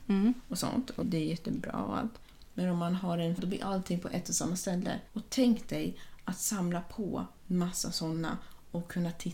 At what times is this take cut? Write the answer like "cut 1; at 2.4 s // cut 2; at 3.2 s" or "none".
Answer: cut 1; at 1.0 s // cut 2; at 2.5 s // cut 3; at 3.4 s // cut 4; at 5.1 s